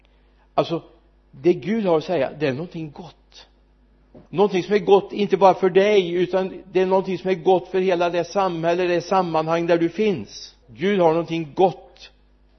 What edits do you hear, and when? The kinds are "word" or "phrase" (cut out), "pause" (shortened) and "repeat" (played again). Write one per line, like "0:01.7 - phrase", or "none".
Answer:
0:04.3 - pause
0:10.6 - pause